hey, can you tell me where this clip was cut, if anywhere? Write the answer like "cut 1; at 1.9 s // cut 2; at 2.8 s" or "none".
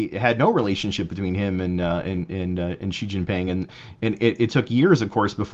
none